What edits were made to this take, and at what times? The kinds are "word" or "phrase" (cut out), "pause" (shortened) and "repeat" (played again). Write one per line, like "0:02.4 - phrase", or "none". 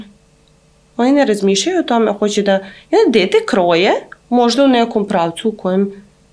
0:04.2 - pause